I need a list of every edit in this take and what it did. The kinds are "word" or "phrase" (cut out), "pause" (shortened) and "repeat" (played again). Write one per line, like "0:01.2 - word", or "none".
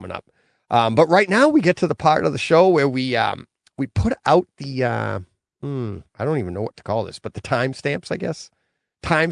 0:06.1 - pause